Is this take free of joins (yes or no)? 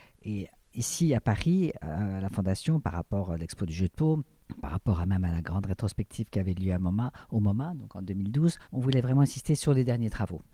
no